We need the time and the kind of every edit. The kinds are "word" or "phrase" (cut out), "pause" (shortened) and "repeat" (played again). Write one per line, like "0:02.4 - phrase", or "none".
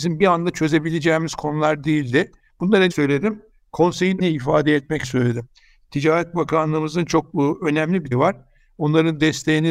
0:02.9 - word
0:04.2 - word
0:05.0 - word
0:08.1 - word

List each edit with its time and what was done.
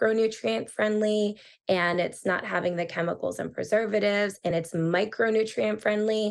none

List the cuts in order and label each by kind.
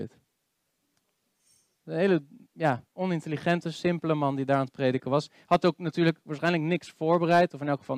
none

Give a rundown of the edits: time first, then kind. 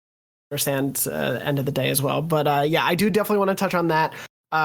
none

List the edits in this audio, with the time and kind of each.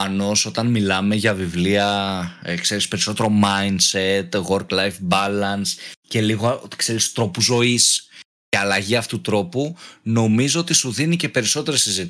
none

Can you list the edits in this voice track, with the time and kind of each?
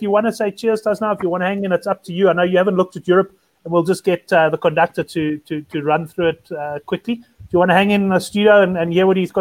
none

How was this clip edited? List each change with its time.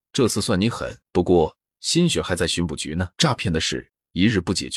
0:01.1 - pause
0:03.1 - pause

